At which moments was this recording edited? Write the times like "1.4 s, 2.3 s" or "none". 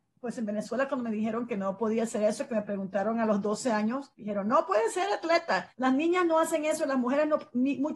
4.1 s, 5.7 s